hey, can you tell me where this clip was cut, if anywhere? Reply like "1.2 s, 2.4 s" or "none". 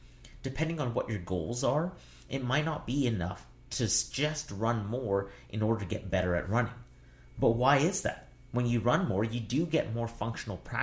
none